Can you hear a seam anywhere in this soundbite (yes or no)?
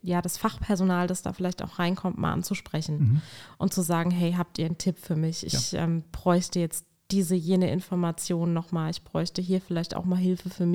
no